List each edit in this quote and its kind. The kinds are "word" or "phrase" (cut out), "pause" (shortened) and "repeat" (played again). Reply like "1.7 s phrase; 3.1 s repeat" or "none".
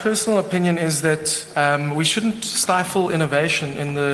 none